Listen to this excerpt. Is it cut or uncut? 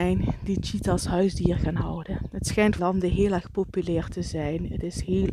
cut